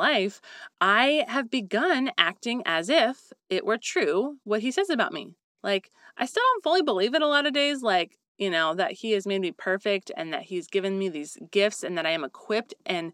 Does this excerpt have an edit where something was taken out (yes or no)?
no